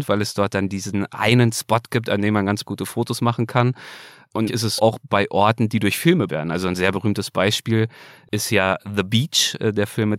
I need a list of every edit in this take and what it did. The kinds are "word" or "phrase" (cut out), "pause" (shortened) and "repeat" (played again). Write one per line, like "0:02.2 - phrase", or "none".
0:02.6 - word
0:04.5 - word
0:04.8 - word
0:06.3 - word